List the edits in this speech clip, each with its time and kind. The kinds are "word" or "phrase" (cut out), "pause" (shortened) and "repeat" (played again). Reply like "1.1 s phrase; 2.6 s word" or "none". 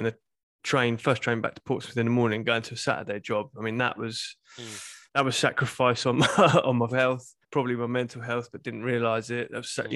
5.1 s pause; 6.9 s word; 7.4 s pause